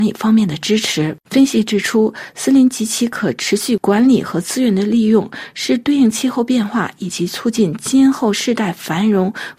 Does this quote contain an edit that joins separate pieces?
yes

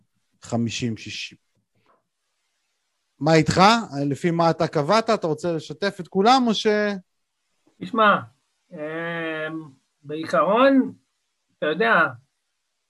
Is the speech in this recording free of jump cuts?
yes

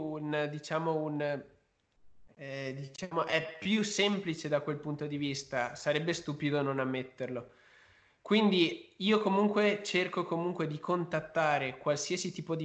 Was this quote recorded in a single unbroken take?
yes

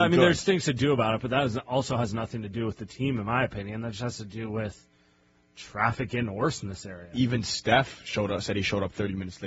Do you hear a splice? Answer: no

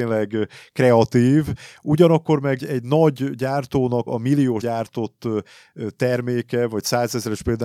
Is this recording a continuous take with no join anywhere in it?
no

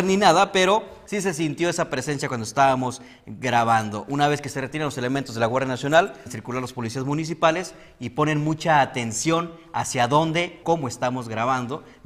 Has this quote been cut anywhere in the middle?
yes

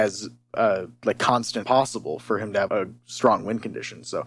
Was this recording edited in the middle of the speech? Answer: yes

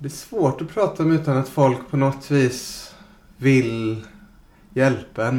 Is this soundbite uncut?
yes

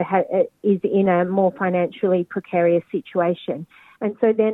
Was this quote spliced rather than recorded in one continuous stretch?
no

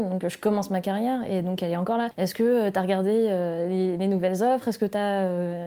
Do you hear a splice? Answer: no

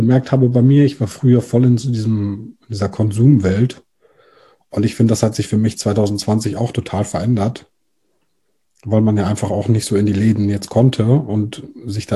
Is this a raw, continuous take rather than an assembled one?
yes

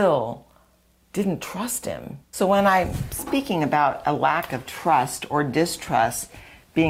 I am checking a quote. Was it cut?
yes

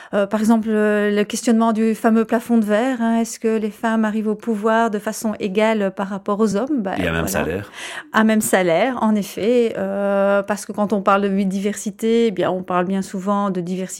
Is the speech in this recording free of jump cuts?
yes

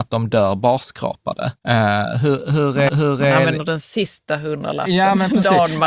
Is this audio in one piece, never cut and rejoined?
no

